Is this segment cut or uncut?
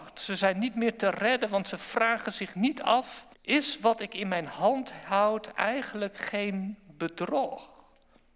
cut